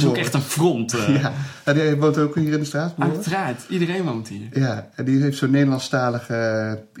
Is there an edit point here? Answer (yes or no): no